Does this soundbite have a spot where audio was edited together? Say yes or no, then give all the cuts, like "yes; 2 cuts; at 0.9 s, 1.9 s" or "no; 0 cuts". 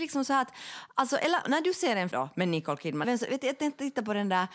yes; 3 cuts; at 1.4 s, 2.1 s, 3.0 s